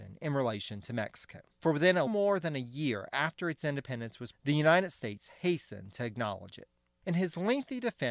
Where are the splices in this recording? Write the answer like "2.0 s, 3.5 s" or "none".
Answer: 2.1 s, 4.3 s